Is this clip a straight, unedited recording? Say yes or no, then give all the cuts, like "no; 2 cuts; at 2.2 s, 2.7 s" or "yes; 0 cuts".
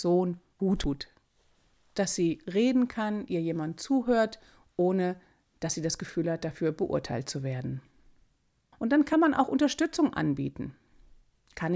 yes; 0 cuts